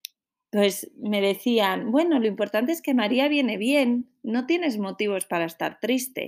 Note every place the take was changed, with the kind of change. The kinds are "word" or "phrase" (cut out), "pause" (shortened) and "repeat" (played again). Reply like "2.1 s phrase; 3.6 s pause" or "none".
none